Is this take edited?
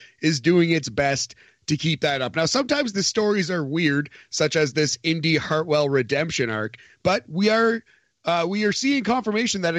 no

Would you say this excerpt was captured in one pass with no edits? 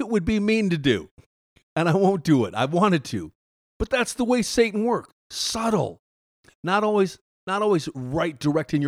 yes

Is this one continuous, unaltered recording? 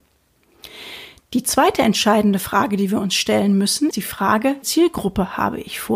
no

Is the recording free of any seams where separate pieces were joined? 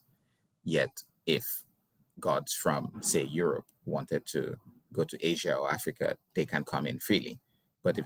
yes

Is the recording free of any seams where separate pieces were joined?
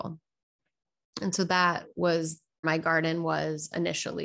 no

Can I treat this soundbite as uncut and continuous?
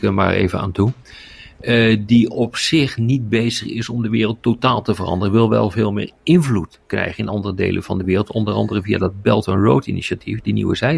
yes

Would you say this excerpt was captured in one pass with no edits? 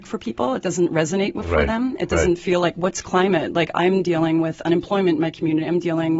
yes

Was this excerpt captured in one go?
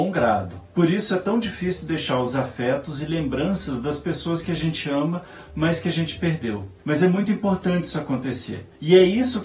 yes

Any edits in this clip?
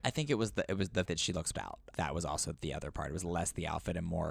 yes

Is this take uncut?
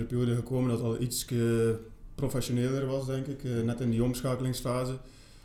yes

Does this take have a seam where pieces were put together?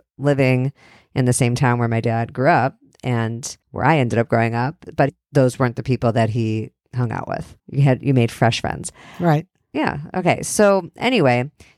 yes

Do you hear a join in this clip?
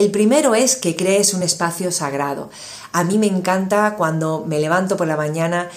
no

